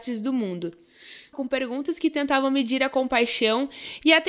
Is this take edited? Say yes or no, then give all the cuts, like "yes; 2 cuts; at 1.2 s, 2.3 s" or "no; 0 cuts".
yes; 1 cut; at 1.3 s